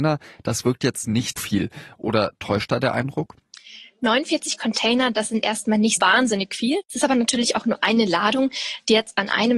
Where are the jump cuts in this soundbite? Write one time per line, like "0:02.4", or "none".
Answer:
0:01.4
0:06.0